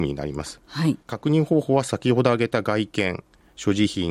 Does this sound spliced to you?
yes; 1 cut; at 1.0 s

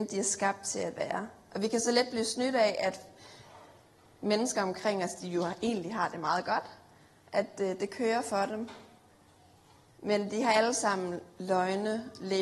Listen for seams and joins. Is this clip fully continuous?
yes; 0 cuts

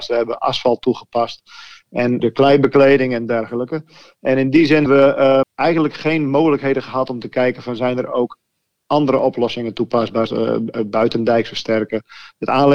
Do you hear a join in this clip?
yes; 4 cuts; at 2.2 s, 4.9 s, 5.4 s, 10.3 s

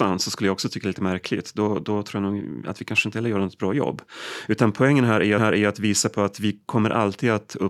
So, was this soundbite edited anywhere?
yes; 1 cut; at 5.4 s

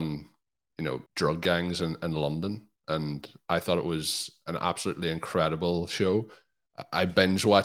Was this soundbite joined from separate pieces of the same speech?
yes; 1 cut; at 1.1 s

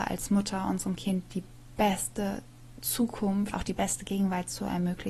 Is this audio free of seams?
no; 1 cut; at 3.5 s

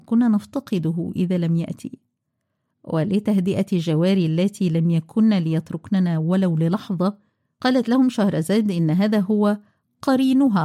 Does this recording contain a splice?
no; 0 cuts

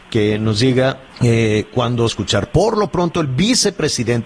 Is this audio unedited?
no; 2 cuts; at 1.1 s, 2.1 s

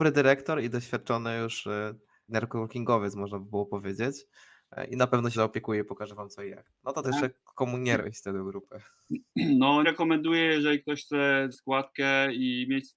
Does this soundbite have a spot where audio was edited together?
yes; 6 cuts; at 2.3 s, 5.3 s, 7.0 s, 8.0 s, 9.8 s, 11.5 s

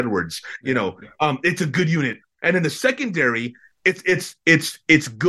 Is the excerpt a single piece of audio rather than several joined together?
yes; 0 cuts

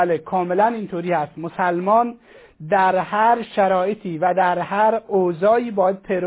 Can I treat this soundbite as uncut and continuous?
yes; 0 cuts

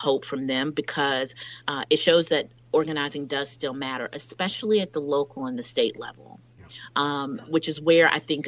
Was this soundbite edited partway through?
no; 0 cuts

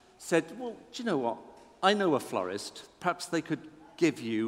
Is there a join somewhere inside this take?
no; 0 cuts

